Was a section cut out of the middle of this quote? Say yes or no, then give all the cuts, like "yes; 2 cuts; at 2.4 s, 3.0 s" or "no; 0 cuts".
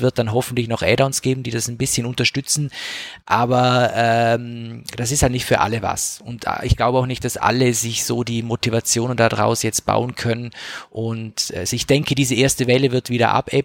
yes; 1 cut; at 3.2 s